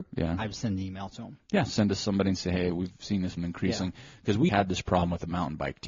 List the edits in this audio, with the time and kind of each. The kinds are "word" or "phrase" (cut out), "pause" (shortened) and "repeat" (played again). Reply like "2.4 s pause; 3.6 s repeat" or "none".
3.4 s word; 4.5 s word